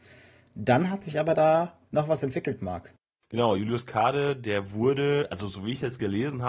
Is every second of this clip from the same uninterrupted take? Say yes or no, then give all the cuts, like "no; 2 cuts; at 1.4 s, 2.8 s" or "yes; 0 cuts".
yes; 0 cuts